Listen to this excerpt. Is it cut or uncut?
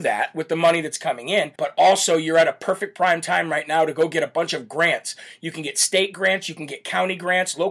cut